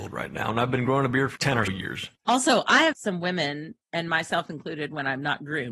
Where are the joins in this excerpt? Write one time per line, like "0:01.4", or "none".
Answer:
0:01.4
0:01.7
0:02.9